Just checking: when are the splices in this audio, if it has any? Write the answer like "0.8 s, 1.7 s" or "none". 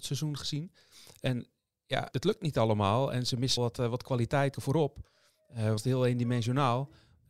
2.1 s, 3.6 s, 4.5 s, 5.8 s